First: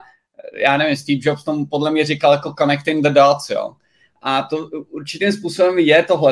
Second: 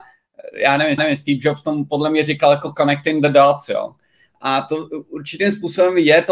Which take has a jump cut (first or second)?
second